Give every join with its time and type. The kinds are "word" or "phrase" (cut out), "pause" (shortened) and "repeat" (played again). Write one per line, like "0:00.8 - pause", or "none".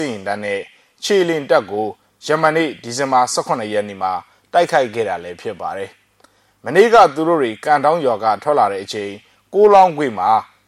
none